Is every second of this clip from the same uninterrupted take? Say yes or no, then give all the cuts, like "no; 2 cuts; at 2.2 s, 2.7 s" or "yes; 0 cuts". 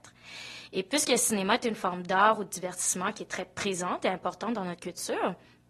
yes; 0 cuts